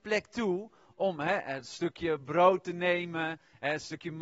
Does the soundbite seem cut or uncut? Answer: uncut